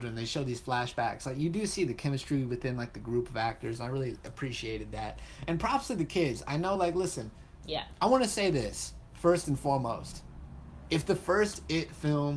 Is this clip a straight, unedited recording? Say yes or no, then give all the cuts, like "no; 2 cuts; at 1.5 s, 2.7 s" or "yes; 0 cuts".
yes; 0 cuts